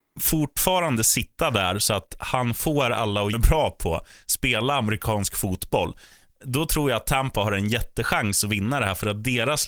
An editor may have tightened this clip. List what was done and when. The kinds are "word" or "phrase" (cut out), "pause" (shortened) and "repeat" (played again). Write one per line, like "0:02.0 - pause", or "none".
0:03.3 - phrase